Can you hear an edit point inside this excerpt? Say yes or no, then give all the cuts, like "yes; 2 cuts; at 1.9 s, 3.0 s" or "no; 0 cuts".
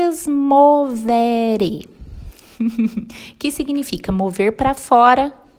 no; 0 cuts